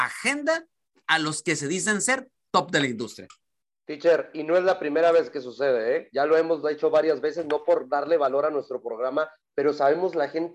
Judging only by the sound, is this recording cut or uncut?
uncut